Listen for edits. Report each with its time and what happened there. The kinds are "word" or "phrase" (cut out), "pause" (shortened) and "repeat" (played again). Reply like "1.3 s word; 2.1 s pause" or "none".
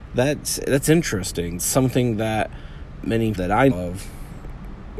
1.6 s word; 3.0 s word; 3.3 s word; 3.7 s word